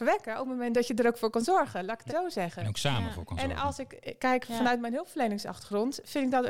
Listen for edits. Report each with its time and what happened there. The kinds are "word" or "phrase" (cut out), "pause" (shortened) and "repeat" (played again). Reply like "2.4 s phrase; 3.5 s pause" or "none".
2.1 s word